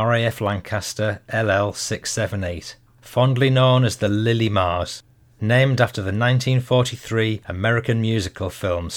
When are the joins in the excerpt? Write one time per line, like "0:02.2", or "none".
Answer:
none